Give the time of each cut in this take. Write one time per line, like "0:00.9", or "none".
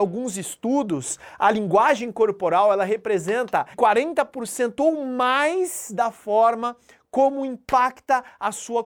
0:03.7